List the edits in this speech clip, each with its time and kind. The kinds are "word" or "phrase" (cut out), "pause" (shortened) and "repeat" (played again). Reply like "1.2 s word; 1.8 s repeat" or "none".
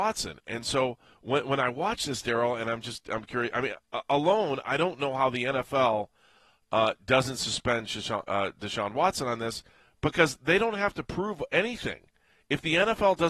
none